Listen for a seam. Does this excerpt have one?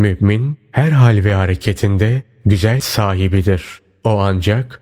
yes; 1 cut; at 2.8 s

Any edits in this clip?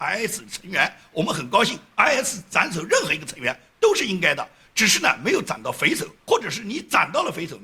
no; 0 cuts

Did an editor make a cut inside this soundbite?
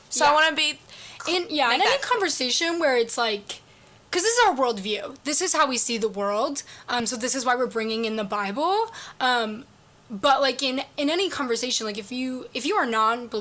no; 0 cuts

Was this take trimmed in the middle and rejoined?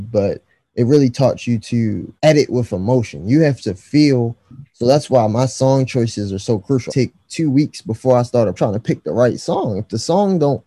yes; 3 cuts; at 2.2 s, 6.9 s, 8.6 s

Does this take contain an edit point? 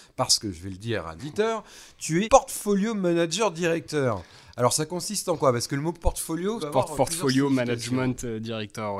yes; 4 cuts; at 1.2 s, 2.3 s, 6.6 s, 6.9 s

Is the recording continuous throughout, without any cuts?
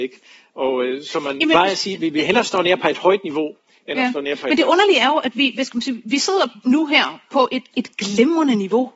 yes; 0 cuts

